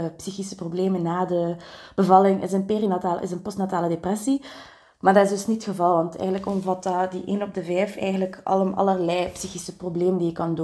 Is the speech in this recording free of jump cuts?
yes; 0 cuts

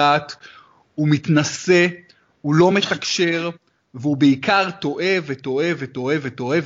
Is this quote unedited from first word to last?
yes; 0 cuts

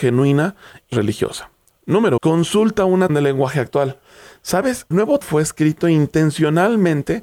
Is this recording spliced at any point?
yes; 5 cuts; at 0.9 s, 2.2 s, 3.1 s, 4.9 s, 5.2 s

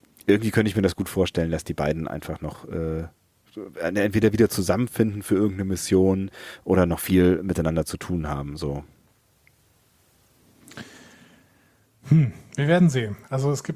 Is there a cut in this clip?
no; 0 cuts

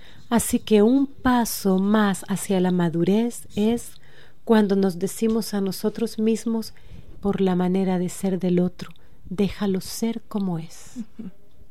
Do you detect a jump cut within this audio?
yes; 1 cut; at 7.2 s

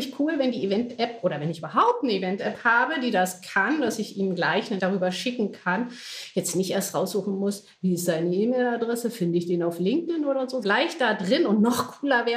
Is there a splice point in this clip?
yes; 2 cuts; at 4.8 s, 10.6 s

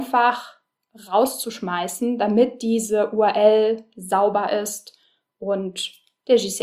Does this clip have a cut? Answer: no; 0 cuts

